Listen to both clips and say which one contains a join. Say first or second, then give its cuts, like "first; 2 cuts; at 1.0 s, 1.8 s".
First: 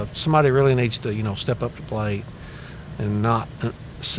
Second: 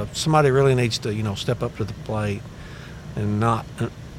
first; 1 cut; at 1.8 s